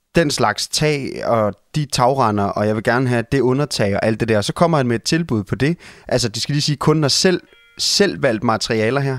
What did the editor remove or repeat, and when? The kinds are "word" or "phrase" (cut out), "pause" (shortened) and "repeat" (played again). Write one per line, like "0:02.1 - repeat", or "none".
none